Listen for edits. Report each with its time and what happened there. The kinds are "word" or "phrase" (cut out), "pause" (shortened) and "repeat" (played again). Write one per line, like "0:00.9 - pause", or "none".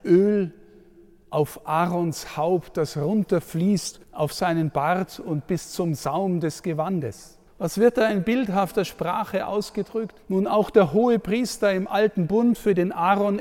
0:04.0 - pause
0:07.5 - pause
0:10.2 - pause

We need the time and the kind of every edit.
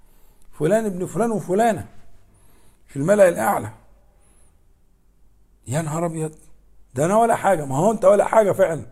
none

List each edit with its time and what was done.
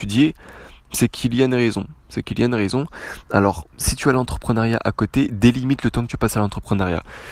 0:02.0 - pause
0:03.7 - pause

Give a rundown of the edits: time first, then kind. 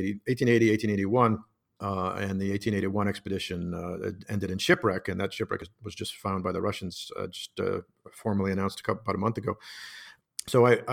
none

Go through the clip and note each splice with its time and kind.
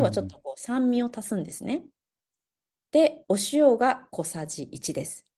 none

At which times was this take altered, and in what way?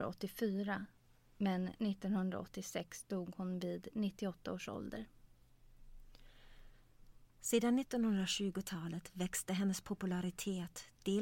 none

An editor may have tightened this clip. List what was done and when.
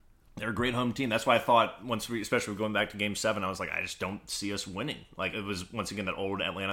0:05.3 - word

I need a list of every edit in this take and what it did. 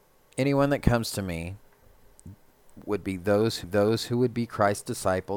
0:03.6 - repeat

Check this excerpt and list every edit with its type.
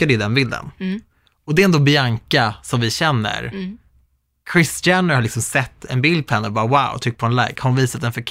none

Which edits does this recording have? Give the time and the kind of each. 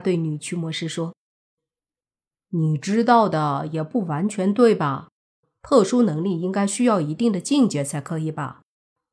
none

